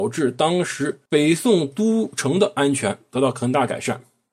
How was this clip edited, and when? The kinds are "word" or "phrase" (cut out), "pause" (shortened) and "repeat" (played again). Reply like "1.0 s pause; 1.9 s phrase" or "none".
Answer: 1.1 s pause